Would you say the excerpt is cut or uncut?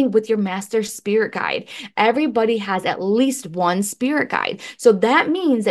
uncut